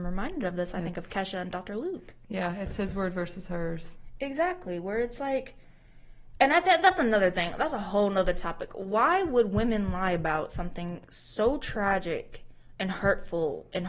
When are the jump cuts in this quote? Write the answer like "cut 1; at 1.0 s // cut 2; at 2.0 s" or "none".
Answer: none